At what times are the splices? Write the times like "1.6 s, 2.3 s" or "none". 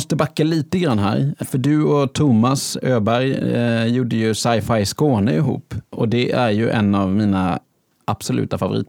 none